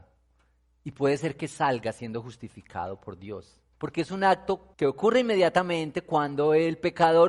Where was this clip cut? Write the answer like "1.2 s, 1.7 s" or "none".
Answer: 3.7 s, 4.7 s